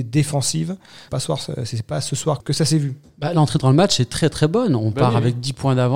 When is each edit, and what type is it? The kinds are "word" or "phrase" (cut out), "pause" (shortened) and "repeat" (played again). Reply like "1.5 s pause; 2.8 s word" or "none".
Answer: 1.1 s word; 2.4 s word